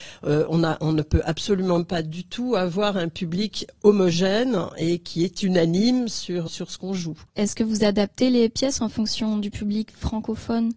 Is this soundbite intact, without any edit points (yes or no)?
no